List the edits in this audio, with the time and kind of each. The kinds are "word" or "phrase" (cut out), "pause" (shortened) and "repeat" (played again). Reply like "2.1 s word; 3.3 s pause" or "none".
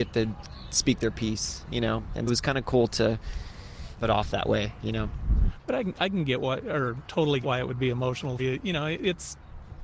2.3 s word; 4.0 s word; 7.4 s word; 8.4 s word